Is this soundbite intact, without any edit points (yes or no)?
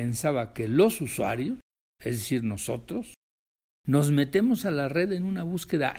yes